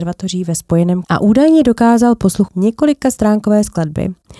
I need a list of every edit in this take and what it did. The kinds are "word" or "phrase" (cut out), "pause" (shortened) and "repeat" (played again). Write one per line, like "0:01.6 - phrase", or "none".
0:01.0 - word
0:02.5 - word